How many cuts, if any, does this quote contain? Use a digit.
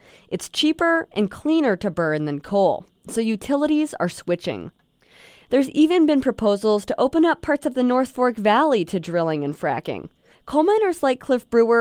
1